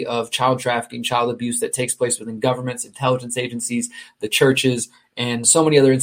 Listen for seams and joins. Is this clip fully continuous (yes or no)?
yes